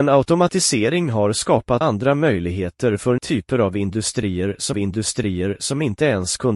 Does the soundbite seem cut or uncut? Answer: cut